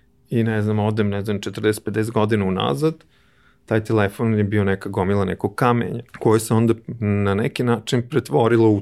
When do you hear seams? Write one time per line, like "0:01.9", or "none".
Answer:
0:06.1